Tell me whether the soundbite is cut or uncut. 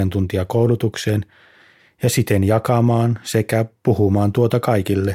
uncut